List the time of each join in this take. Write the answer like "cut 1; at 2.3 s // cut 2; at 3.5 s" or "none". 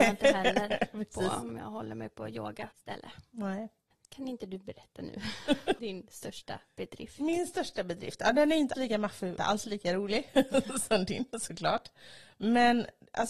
cut 1; at 5.8 s // cut 2; at 8.7 s // cut 3; at 9.4 s